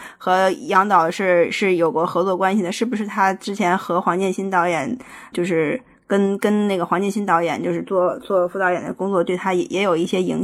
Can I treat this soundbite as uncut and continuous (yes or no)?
no